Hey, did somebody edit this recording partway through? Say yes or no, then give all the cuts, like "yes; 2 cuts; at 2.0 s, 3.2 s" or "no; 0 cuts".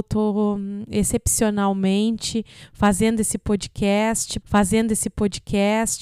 yes; 1 cut; at 4.4 s